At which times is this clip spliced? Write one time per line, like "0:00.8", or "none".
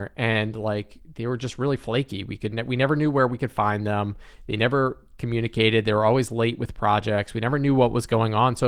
none